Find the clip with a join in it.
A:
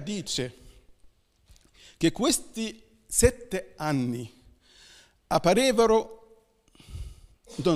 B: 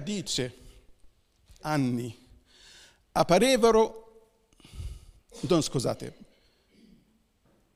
B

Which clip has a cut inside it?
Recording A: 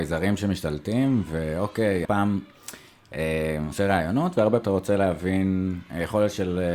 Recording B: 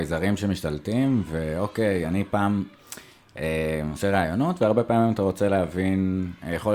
A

